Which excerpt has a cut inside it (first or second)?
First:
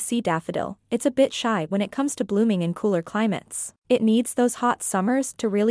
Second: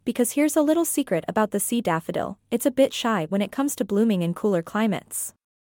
first